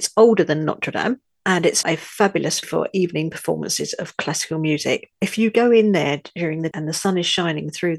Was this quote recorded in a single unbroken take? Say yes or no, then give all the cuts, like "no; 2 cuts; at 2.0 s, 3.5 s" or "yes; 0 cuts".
no; 3 cuts; at 1.8 s, 2.6 s, 6.7 s